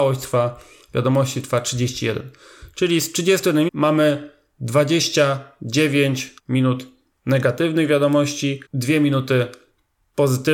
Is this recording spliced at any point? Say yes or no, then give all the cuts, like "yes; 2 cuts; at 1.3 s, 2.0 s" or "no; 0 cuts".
yes; 3 cuts; at 3.7 s, 6.4 s, 8.7 s